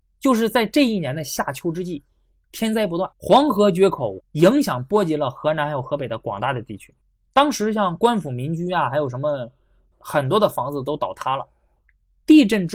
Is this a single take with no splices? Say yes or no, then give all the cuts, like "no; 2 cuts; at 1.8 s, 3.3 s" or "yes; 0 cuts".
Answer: no; 3 cuts; at 3.1 s, 4.2 s, 7.0 s